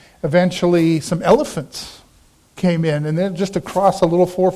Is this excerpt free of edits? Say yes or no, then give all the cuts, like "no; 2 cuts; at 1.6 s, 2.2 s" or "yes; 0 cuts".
yes; 0 cuts